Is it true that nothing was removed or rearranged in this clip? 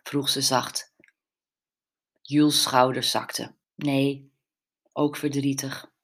no; 1 cut; at 3.6 s

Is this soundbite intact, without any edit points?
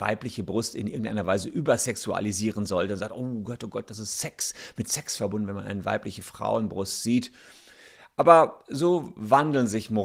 yes; 0 cuts

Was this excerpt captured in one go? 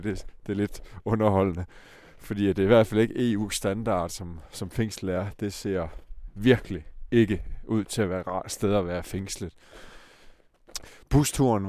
yes; 0 cuts

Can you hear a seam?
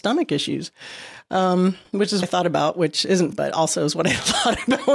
yes; 2 cuts; at 2.2 s, 3.3 s

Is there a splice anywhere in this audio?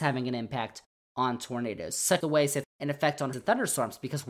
yes; 3 cuts; at 2.2 s, 2.6 s, 3.3 s

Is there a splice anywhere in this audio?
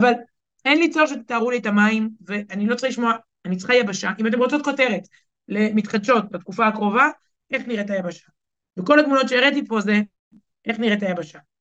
no; 0 cuts

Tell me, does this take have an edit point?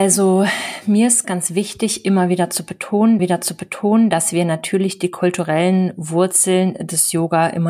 yes; 2 cuts; at 1.2 s, 3.2 s

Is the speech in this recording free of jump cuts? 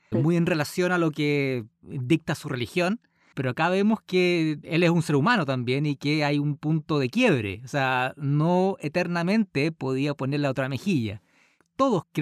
yes; 0 cuts

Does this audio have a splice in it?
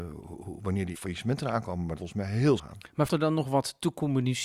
yes; 4 cuts; at 0.9 s, 2.0 s, 2.6 s, 3.1 s

